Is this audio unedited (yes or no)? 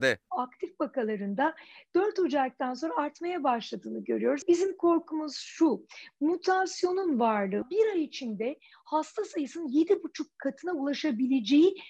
yes